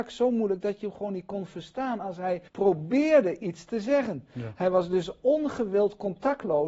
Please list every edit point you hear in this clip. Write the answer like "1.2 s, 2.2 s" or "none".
2.5 s